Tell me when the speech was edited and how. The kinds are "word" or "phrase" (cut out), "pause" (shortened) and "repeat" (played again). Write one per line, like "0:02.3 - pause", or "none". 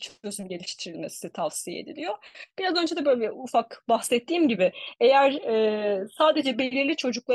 none